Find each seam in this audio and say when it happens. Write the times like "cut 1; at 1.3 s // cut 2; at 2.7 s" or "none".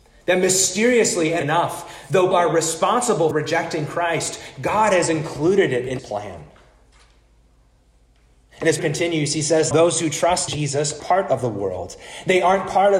cut 1; at 1.4 s // cut 2; at 2.3 s // cut 3; at 3.3 s // cut 4; at 6.0 s // cut 5; at 8.8 s // cut 6; at 9.7 s // cut 7; at 10.5 s // cut 8; at 11.0 s